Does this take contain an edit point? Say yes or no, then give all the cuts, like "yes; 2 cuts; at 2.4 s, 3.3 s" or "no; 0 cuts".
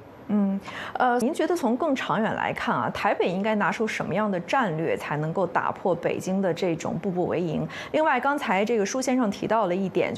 yes; 1 cut; at 1.2 s